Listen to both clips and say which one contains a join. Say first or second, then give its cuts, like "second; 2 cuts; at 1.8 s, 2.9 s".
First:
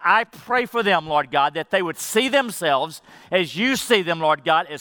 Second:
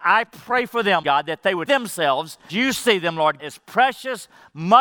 second; 4 cuts; at 1.0 s, 1.7 s, 2.5 s, 3.4 s